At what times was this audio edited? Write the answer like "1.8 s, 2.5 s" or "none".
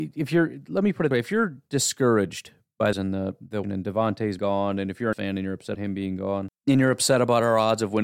1.1 s, 2.9 s, 3.6 s, 4.4 s, 5.1 s, 5.7 s, 6.6 s